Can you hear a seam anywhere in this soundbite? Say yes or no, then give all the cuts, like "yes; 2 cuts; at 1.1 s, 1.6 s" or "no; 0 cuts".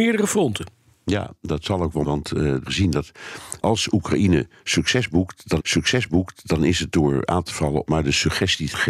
yes; 5 cuts; at 2.0 s, 2.7 s, 3.6 s, 5.6 s, 7.9 s